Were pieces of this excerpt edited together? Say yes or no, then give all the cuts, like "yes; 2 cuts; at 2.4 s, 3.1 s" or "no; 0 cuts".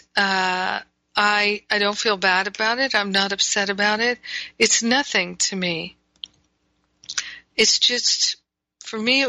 no; 0 cuts